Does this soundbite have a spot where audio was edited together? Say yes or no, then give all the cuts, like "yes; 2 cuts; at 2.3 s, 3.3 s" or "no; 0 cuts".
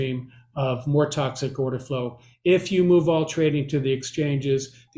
no; 0 cuts